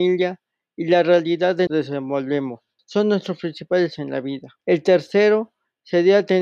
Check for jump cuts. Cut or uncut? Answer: cut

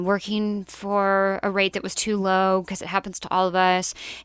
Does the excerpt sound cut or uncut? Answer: uncut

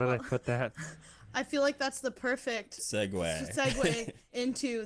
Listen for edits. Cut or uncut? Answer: uncut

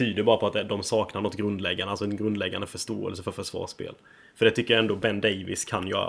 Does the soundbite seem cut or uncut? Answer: uncut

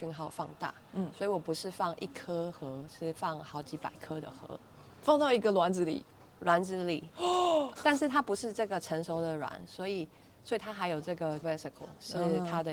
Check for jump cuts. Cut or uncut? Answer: cut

